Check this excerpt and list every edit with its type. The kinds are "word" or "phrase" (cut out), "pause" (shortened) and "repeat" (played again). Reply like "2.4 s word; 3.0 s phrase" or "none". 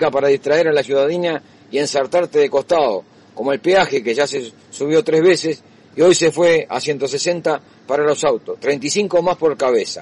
none